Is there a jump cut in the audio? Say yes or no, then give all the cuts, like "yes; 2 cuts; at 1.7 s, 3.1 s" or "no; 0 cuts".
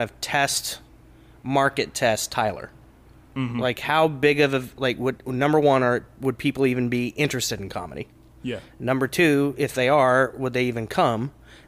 no; 0 cuts